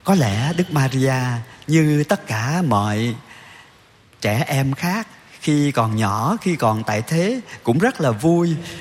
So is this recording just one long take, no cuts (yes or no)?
yes